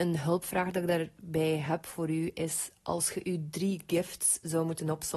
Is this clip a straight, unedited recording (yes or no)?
yes